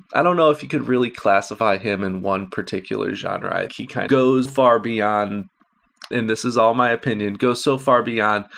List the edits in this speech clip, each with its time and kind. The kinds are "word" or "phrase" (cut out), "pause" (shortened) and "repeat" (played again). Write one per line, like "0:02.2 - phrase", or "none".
0:03.7 - word
0:04.1 - word
0:04.5 - word
0:06.1 - word